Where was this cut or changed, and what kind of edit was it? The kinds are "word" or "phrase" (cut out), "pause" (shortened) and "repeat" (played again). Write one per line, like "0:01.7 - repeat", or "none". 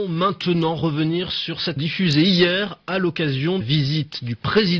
0:01.8 - word
0:03.6 - phrase